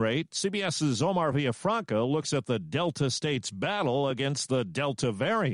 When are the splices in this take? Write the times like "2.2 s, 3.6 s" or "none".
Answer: none